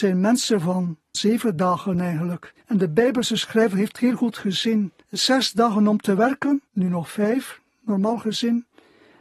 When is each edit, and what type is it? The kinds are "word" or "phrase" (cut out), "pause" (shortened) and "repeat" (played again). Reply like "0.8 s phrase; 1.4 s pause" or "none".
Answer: 1.1 s word; 2.6 s pause; 3.9 s word; 5.0 s pause; 6.7 s pause